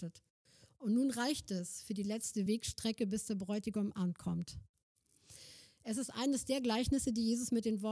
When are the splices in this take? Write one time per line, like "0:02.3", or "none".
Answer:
none